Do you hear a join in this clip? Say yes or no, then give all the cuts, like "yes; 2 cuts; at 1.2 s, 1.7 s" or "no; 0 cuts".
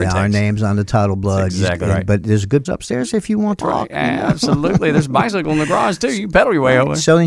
yes; 2 cuts; at 2.6 s, 3.6 s